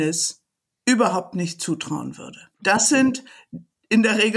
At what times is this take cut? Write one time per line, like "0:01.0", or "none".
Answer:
0:02.5